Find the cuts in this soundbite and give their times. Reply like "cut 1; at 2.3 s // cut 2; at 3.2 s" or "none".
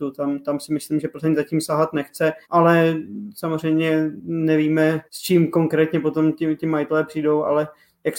cut 1; at 2.4 s // cut 2; at 5.1 s